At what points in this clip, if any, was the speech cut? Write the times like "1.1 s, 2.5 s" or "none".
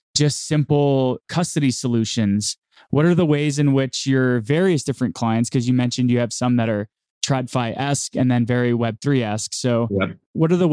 none

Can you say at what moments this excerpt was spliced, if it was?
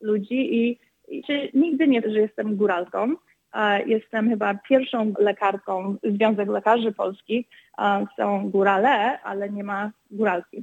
1.2 s, 2.0 s, 5.1 s

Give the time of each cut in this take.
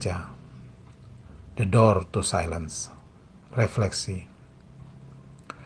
none

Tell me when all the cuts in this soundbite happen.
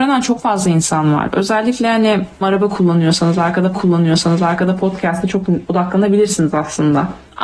2.4 s, 3.7 s, 5.7 s

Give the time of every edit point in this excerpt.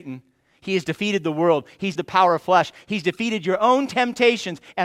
2.0 s

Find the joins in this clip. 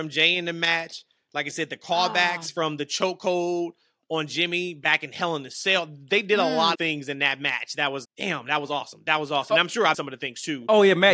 6.7 s, 8.0 s, 9.9 s

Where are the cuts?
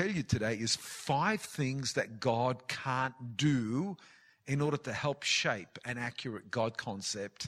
none

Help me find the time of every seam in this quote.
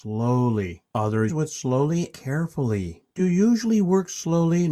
1.3 s, 2.1 s, 3.2 s

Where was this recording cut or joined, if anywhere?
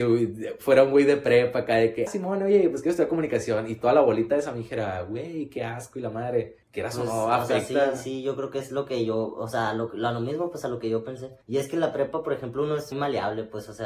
2.1 s, 6.6 s, 11.4 s, 12.9 s

